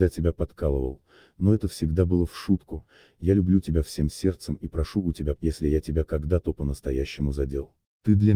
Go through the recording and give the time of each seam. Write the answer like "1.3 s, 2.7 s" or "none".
5.4 s